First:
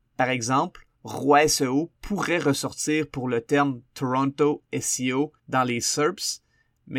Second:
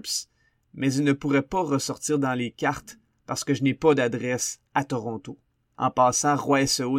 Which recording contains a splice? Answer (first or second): first